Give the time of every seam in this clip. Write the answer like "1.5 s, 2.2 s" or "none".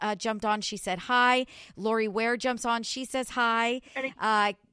none